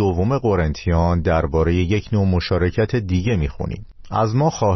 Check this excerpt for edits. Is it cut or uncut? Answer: uncut